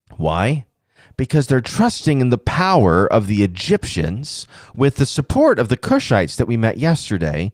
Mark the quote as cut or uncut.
uncut